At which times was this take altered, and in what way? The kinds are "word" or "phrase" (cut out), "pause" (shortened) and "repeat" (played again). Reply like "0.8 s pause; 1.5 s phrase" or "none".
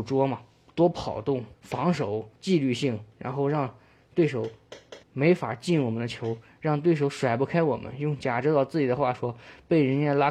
1.5 s pause; 2.4 s pause; 5.0 s pause

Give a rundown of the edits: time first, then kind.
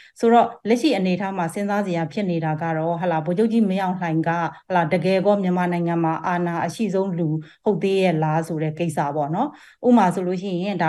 none

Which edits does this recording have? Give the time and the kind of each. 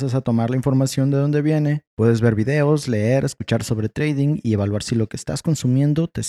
1.9 s pause

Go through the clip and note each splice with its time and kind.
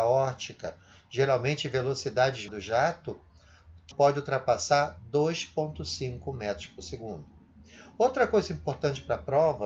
2.5 s word; 3.9 s word

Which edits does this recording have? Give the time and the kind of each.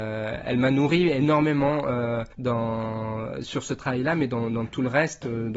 2.3 s pause

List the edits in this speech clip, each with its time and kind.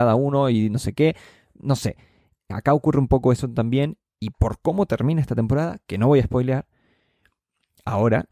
none

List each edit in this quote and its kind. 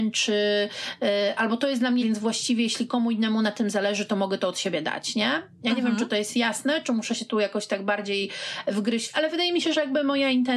2.0 s word; 9.1 s word

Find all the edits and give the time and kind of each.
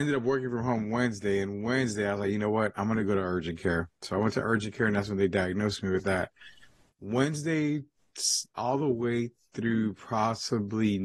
none

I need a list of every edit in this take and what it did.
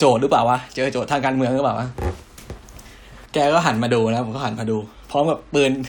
3.3 s pause

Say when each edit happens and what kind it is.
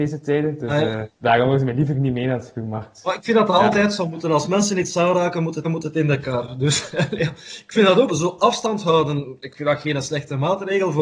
1.1 s pause; 5.6 s repeat; 8.1 s word

